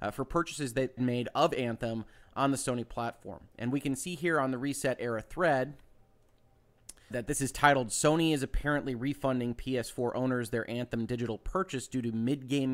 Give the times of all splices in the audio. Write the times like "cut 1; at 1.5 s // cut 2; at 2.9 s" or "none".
cut 1; at 1.0 s // cut 2; at 3.5 s // cut 3; at 7.1 s